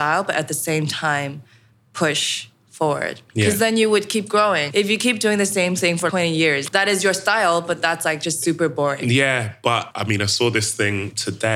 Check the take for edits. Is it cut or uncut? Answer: uncut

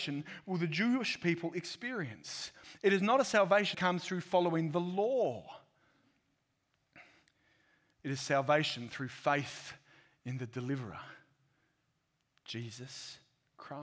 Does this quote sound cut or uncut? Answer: cut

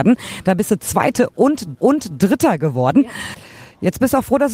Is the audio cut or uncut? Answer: cut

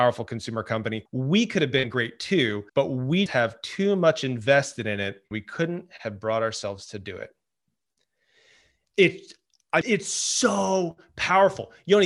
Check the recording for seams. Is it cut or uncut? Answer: cut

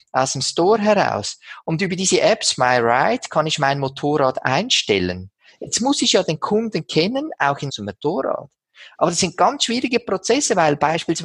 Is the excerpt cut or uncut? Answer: cut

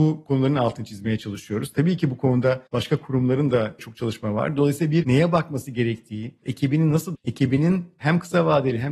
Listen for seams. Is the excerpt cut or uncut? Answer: cut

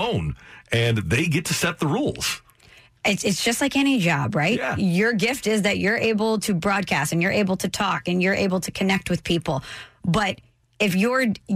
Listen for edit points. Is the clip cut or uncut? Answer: uncut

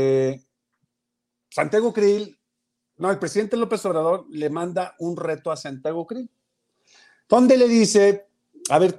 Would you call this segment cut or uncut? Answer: uncut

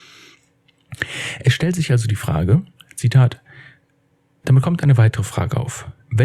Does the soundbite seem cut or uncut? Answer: uncut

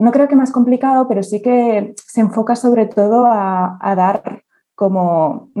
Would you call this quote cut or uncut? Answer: uncut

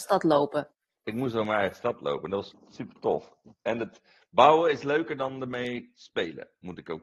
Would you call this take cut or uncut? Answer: cut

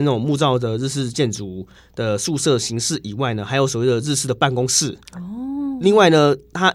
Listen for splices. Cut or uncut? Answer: cut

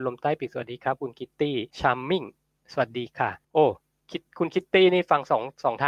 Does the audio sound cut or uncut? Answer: cut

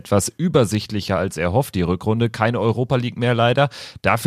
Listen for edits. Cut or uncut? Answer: uncut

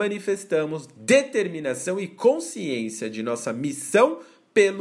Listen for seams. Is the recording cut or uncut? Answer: uncut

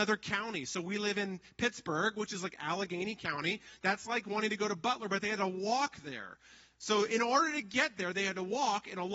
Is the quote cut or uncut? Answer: uncut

